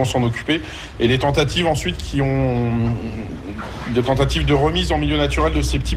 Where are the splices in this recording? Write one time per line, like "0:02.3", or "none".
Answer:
none